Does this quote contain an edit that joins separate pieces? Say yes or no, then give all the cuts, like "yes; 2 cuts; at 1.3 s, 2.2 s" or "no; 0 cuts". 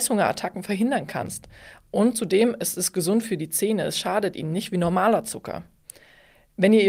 no; 0 cuts